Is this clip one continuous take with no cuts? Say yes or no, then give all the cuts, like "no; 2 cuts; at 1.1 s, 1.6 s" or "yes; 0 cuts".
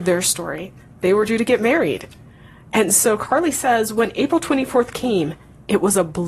yes; 0 cuts